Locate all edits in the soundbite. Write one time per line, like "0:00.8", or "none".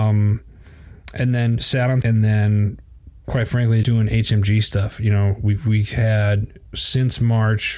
0:02.0
0:03.8
0:06.7